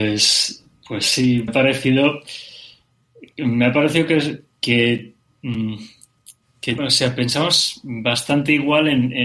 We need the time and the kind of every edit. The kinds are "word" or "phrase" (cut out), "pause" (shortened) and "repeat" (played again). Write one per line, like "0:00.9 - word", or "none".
0:01.5 - word
0:06.8 - word